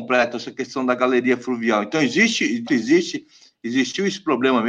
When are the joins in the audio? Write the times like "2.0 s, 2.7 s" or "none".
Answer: 2.7 s